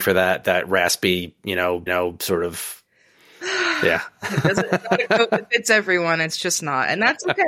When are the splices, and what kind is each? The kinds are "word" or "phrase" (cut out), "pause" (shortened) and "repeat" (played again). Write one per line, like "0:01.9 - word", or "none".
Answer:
0:01.9 - repeat